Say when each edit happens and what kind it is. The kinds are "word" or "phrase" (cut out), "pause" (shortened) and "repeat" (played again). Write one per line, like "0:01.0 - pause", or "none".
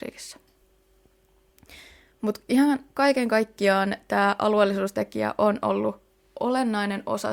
none